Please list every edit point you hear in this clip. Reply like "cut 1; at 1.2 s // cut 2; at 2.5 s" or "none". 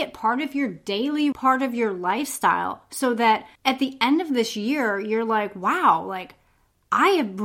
cut 1; at 1.3 s // cut 2; at 3.6 s